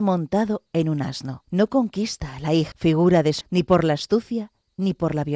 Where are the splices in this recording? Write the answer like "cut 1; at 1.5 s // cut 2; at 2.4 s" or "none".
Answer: cut 1; at 1.5 s // cut 2; at 2.7 s // cut 3; at 3.4 s